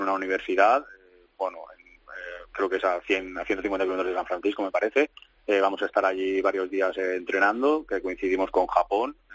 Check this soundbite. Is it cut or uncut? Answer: uncut